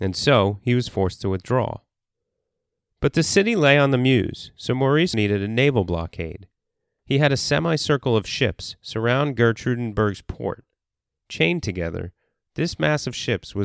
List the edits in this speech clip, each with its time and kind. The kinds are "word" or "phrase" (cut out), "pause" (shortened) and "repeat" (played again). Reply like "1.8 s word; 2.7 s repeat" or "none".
5.1 s word